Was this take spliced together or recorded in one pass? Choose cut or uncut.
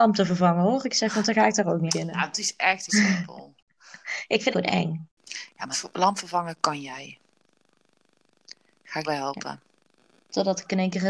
cut